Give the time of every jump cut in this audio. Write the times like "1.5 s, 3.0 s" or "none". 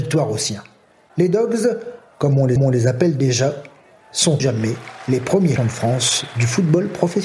2.6 s, 4.4 s, 5.6 s